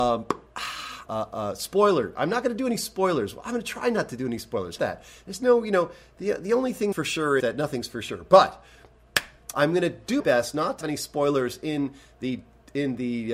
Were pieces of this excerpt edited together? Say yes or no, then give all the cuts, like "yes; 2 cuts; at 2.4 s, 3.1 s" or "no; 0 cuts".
yes; 7 cuts; at 1.1 s, 4.8 s, 6.9 s, 7.4 s, 9.5 s, 10.2 s, 10.8 s